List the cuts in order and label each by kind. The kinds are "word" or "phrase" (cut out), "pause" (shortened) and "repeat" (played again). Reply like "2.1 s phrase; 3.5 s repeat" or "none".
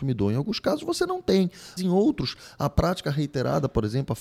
1.8 s word